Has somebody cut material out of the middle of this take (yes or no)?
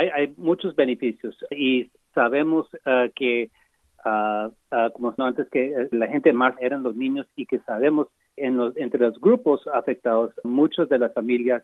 yes